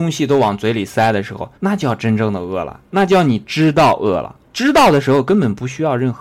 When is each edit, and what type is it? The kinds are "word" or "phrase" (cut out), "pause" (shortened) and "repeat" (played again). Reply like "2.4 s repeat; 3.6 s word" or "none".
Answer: 1.6 s pause; 4.4 s pause